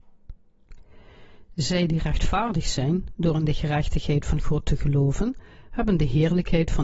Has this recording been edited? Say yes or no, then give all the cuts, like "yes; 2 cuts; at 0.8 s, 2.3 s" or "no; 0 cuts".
no; 0 cuts